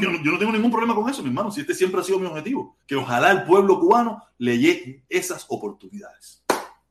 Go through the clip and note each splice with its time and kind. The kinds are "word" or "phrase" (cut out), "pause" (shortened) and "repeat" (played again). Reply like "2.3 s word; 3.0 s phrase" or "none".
2.8 s pause